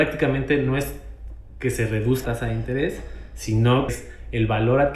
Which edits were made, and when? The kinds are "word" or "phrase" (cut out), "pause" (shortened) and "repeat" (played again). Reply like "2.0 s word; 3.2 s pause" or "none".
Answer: 2.2 s word; 3.9 s word